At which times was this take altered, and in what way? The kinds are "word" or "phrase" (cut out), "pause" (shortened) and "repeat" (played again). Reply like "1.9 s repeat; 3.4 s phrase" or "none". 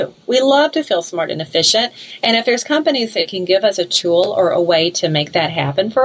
none

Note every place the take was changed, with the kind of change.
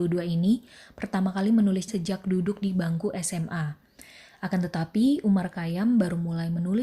1.9 s word

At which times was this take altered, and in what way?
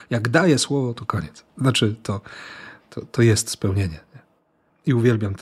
none

